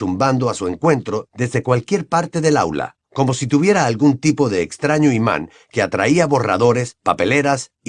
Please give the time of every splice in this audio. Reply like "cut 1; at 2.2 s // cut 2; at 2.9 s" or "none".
none